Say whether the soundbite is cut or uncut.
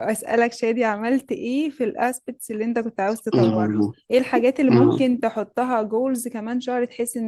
cut